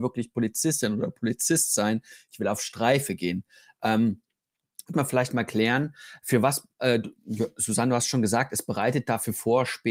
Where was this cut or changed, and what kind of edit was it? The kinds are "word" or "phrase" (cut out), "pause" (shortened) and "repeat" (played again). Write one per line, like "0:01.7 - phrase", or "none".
0:04.9 - word